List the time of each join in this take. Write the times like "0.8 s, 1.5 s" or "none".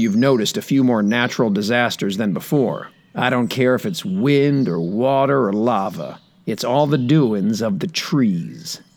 none